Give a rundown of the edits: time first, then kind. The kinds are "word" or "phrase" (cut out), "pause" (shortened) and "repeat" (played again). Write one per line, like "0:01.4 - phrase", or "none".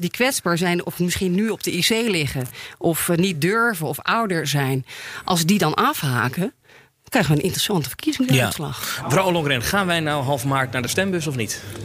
none